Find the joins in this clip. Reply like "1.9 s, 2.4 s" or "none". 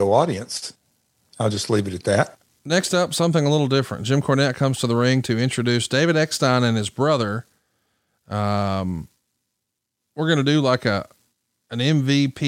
none